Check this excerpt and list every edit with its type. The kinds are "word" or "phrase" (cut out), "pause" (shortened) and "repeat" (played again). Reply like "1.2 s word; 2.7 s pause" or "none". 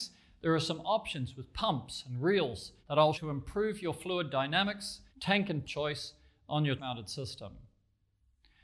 2.8 s pause; 3.1 s word; 5.1 s pause; 5.6 s word; 6.8 s word